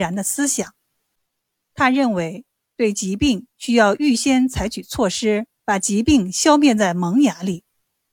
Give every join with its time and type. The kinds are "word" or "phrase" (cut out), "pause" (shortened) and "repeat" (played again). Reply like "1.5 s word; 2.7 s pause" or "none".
5.6 s pause